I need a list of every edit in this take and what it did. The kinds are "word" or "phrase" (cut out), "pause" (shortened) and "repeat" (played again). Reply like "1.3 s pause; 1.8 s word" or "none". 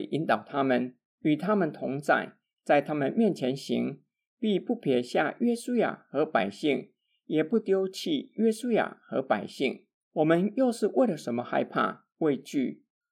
10.0 s pause